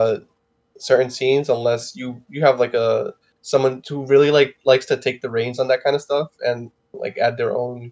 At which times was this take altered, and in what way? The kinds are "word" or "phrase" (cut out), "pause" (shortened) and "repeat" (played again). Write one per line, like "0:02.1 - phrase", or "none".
none